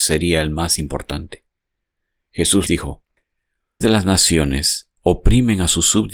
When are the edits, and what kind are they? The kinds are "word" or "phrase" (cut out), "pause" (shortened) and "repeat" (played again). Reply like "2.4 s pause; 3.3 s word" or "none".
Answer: 2.7 s word; 3.8 s phrase; 5.0 s pause